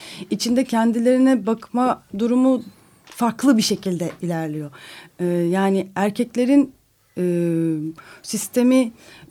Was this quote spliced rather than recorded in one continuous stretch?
no; 0 cuts

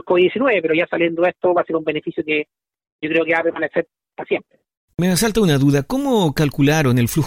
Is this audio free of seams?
yes; 0 cuts

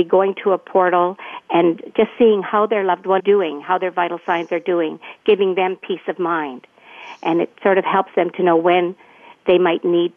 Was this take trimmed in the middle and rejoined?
yes; 1 cut; at 3.2 s

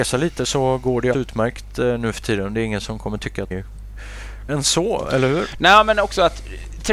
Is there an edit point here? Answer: yes; 3 cuts; at 1.1 s, 3.5 s, 4.5 s

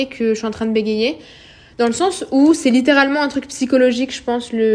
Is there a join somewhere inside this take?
no; 0 cuts

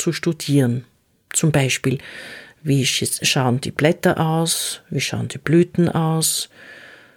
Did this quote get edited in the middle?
no; 0 cuts

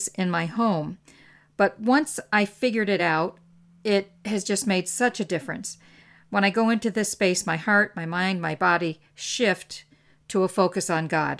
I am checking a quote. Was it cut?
no; 0 cuts

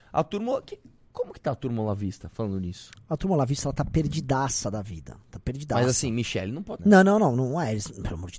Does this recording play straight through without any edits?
no; 1 cut; at 6.8 s

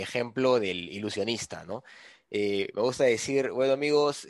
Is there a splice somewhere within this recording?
no; 0 cuts

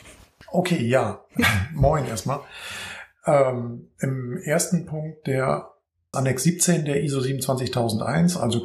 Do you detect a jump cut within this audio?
yes; 1 cut; at 6.1 s

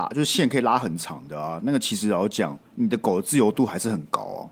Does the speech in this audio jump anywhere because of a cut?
yes; 1 cut; at 2.7 s

